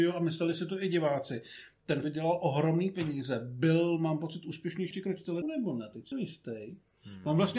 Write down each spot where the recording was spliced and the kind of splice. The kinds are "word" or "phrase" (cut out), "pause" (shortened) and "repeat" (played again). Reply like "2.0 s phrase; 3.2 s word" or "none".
2.0 s word; 4.9 s word; 5.4 s word; 6.1 s word